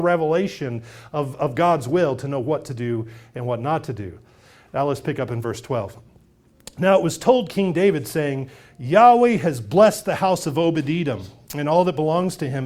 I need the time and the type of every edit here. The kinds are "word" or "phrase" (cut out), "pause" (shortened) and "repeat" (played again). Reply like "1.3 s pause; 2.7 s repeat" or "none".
none